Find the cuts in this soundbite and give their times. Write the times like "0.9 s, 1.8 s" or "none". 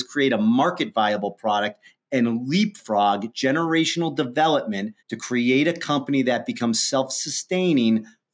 5.0 s